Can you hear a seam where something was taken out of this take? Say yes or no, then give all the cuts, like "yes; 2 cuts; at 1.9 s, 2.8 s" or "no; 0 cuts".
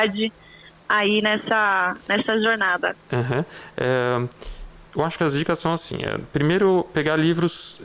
no; 0 cuts